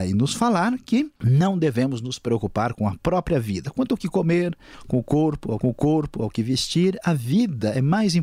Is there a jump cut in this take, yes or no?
yes